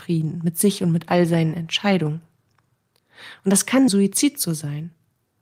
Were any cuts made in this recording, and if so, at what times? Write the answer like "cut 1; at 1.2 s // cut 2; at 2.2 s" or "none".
cut 1; at 3.9 s